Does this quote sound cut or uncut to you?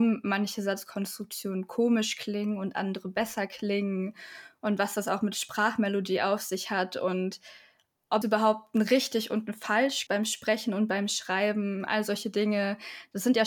cut